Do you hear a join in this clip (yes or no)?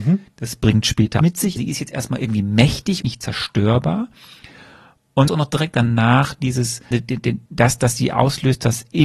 yes